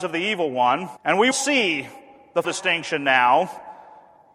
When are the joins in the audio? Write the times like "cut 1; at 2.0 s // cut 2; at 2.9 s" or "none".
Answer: cut 1; at 1.0 s // cut 2; at 1.3 s // cut 3; at 2.4 s